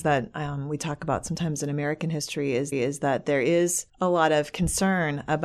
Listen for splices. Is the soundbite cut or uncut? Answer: cut